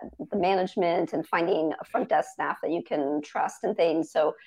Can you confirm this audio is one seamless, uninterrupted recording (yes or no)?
yes